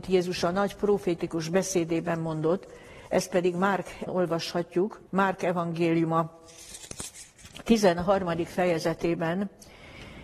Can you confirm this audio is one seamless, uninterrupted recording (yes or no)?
no